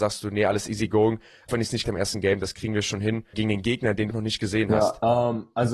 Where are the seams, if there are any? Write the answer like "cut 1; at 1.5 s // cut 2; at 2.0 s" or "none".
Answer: cut 1; at 1.5 s // cut 2; at 1.8 s // cut 3; at 3.3 s // cut 4; at 4.1 s